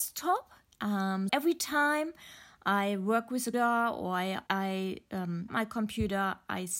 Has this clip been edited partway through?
yes; 4 cuts; at 1.3 s, 3.5 s, 4.5 s, 5.5 s

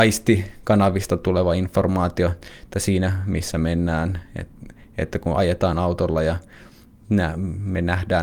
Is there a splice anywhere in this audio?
no; 0 cuts

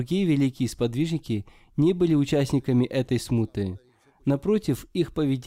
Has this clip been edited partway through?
no; 0 cuts

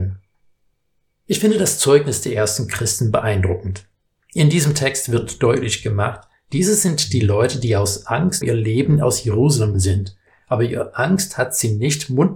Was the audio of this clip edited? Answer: yes; 2 cuts; at 8.4 s, 9.7 s

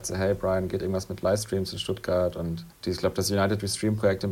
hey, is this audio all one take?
no; 1 cut; at 2.7 s

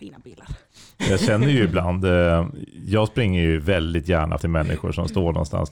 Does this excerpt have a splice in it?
yes; 1 cut; at 4.4 s

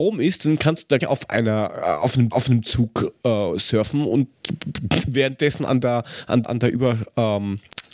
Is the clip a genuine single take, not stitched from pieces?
no; 3 cuts; at 1.0 s, 2.3 s, 6.4 s

